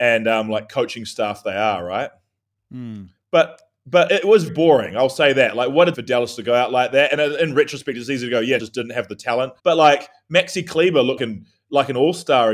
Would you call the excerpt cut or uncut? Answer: cut